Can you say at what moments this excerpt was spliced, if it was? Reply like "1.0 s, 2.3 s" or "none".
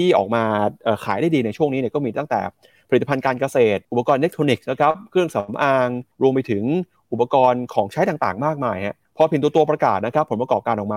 3.8 s, 6.1 s, 9.1 s